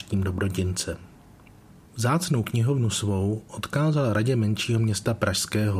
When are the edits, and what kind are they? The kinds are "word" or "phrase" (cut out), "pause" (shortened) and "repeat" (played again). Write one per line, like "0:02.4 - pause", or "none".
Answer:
none